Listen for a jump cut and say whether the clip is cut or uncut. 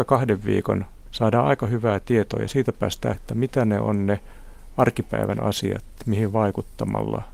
cut